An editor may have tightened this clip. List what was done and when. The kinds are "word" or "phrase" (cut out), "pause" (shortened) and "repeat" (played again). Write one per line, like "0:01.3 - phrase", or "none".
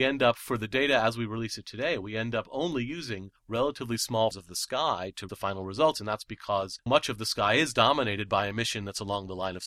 0:04.3 - word
0:05.3 - word
0:06.9 - word